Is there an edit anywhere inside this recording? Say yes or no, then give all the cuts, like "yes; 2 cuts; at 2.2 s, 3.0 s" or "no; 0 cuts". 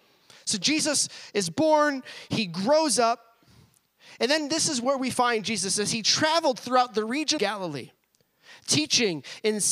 yes; 1 cut; at 7.4 s